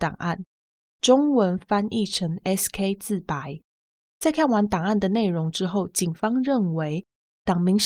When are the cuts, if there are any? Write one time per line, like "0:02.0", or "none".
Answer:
none